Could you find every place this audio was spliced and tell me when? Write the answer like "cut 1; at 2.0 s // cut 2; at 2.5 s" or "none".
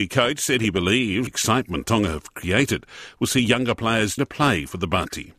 cut 1; at 1.3 s // cut 2; at 4.2 s

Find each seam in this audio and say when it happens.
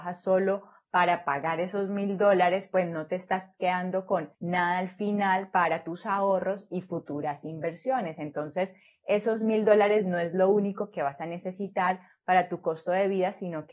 cut 1; at 4.3 s

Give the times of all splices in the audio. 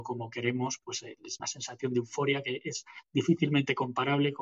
cut 1; at 1.4 s

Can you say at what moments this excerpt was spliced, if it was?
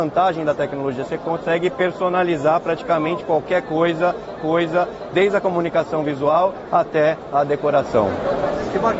cut 1; at 4.4 s

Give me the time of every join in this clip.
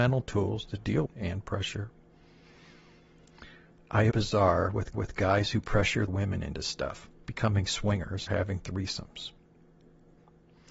cut 1; at 1.1 s // cut 2; at 4.1 s // cut 3; at 4.9 s // cut 4; at 6.1 s // cut 5; at 7.3 s // cut 6; at 8.3 s

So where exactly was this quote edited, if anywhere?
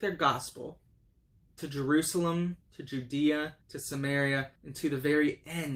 cut 1; at 2.6 s // cut 2; at 3.6 s // cut 3; at 4.6 s

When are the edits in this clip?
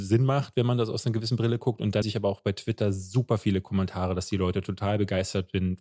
cut 1; at 2.0 s

